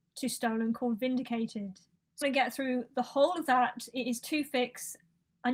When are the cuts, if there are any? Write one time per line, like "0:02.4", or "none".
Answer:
0:02.2